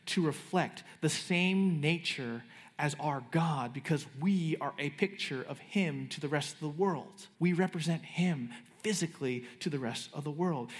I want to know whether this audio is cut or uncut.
cut